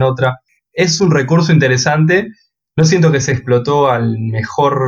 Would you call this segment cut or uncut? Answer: uncut